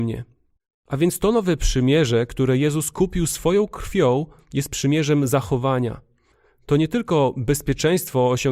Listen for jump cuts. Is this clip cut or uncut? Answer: uncut